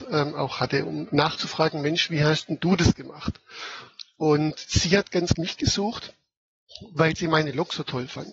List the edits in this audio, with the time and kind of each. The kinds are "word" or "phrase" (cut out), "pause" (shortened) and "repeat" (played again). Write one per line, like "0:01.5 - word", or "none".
0:01.1 - word
0:05.3 - word